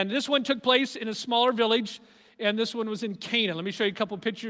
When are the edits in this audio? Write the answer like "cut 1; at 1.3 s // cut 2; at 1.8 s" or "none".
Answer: none